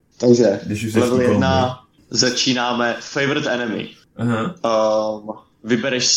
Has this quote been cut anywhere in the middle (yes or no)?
no